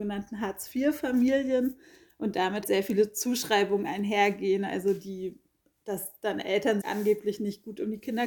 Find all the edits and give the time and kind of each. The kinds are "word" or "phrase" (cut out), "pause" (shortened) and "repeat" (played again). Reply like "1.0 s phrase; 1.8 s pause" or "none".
2.6 s word; 6.8 s word